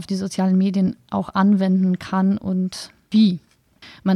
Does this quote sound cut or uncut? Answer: uncut